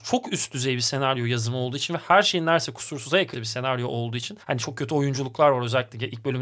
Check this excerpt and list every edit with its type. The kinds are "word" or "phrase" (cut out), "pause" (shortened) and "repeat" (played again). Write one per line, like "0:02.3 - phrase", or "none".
0:03.3 - word
0:04.4 - pause